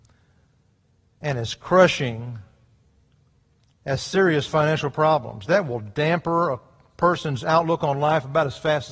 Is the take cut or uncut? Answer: uncut